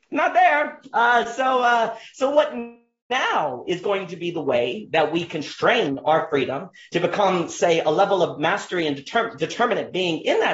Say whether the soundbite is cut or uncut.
uncut